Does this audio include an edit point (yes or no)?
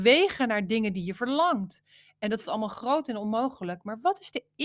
yes